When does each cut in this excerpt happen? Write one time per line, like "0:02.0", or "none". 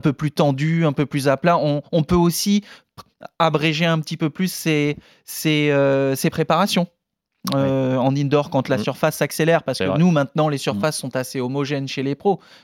none